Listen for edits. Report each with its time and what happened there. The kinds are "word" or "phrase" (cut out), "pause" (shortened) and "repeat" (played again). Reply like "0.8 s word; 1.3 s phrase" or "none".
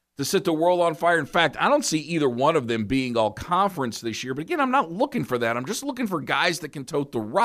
none